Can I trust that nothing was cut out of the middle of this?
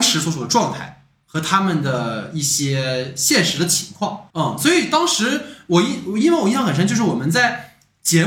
no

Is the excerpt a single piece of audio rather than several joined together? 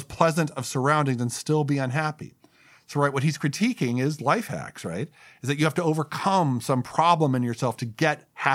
yes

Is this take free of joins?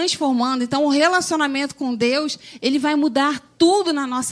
yes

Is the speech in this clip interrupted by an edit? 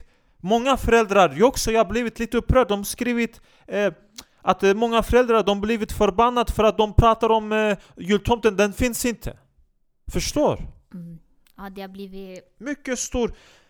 no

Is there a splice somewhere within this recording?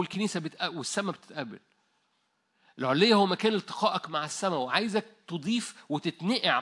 no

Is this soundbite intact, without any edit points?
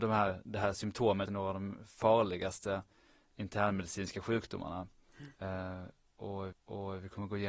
no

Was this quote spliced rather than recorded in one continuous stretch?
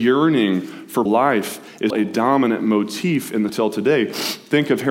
yes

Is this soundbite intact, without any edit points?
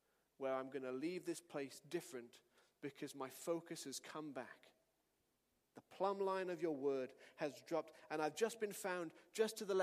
yes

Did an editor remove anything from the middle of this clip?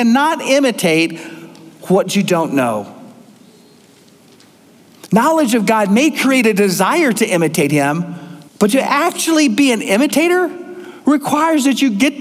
yes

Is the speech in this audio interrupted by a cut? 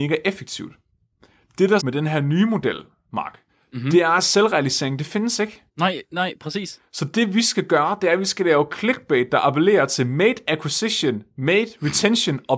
yes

